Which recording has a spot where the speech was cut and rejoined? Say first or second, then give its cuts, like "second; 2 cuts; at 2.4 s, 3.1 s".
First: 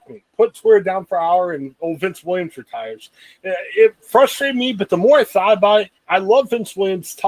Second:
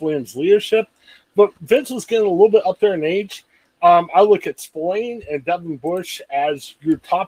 first; 1 cut; at 6.0 s